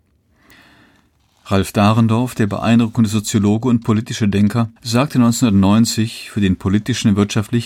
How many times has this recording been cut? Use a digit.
1